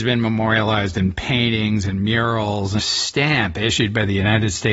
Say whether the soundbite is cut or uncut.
cut